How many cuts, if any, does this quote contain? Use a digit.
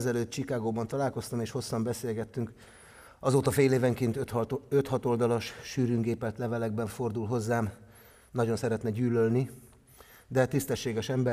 0